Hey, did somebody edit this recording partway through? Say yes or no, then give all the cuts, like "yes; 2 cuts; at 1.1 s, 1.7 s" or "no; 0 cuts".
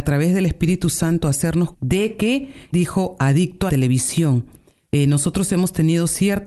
yes; 3 cuts; at 1.7 s, 2.7 s, 3.7 s